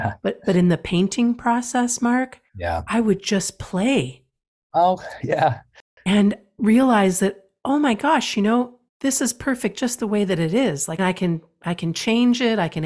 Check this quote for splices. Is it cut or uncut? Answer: cut